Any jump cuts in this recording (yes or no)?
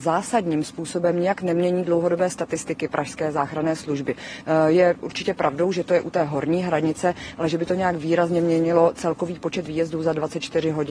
no